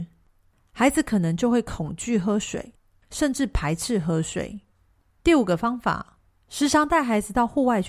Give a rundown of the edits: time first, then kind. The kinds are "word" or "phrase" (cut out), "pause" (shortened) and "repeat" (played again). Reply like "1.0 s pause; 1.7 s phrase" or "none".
none